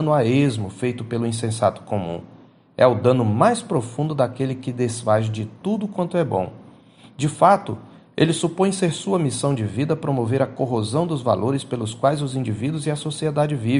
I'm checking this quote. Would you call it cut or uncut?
uncut